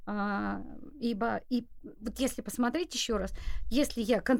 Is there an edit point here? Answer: yes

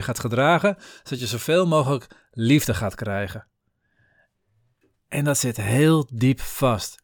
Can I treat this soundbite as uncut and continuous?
yes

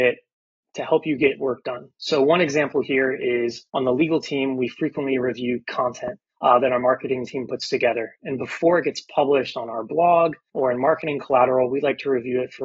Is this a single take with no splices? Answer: no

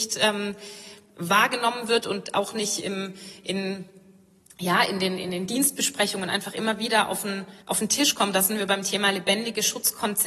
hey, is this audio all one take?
no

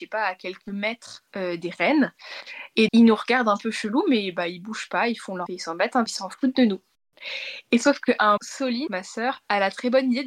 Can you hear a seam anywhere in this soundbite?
yes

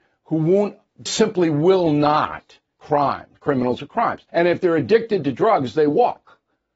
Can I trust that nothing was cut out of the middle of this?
no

